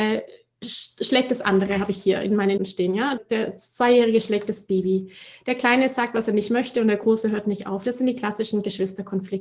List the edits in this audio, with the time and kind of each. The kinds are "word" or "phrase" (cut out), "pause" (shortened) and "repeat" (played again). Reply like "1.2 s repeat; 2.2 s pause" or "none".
2.6 s word; 3.2 s word